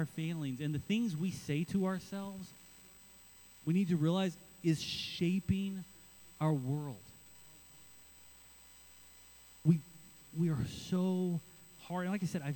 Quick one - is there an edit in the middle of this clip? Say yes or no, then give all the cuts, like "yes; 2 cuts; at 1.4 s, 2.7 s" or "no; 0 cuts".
no; 0 cuts